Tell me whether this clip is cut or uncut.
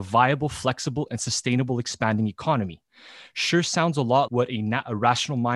cut